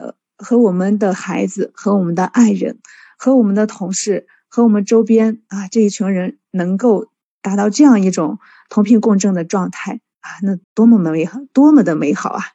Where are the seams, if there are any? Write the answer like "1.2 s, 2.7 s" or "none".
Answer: 10.6 s